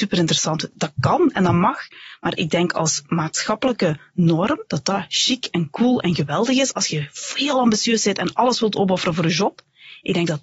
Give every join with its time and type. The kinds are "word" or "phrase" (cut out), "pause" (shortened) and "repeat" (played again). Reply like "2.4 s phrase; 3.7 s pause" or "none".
4.7 s pause